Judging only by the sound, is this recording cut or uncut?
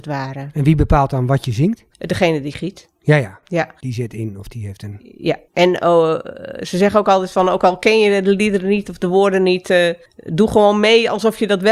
cut